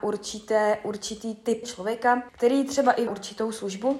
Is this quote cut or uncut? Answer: cut